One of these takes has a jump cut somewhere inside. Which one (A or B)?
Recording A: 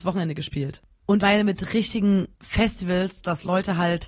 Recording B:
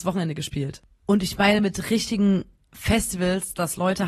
A